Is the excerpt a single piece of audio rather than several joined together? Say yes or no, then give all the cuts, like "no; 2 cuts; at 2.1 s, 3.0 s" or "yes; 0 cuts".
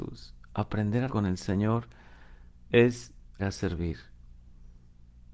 no; 2 cuts; at 1.1 s, 3.4 s